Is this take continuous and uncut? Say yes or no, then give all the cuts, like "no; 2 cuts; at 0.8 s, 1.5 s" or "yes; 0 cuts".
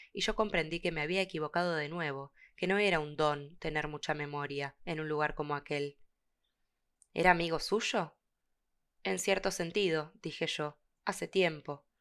yes; 0 cuts